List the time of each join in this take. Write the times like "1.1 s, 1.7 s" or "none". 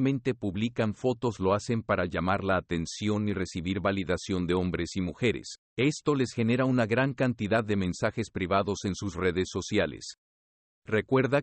1.4 s, 5.7 s